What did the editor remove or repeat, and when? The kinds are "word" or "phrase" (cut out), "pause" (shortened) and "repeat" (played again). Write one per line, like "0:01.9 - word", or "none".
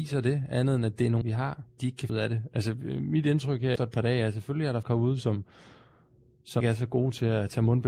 0:01.2 - word
0:01.8 - word
0:02.1 - word
0:03.8 - word
0:04.8 - word
0:06.6 - word